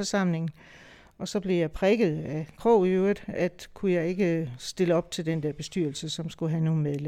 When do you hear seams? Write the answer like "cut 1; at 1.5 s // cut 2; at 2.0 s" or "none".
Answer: cut 1; at 2.6 s